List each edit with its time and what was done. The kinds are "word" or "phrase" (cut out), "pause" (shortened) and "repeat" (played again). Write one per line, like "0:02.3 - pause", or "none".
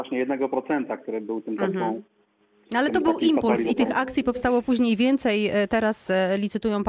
none